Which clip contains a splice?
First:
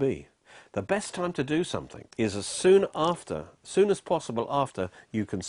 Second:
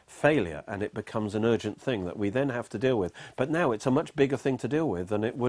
first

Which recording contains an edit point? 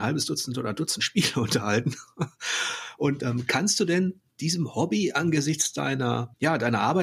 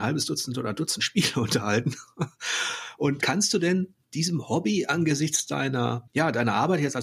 second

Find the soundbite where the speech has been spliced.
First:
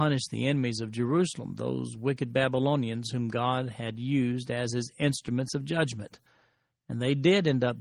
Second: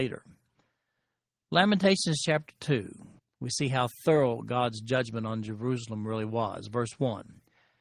second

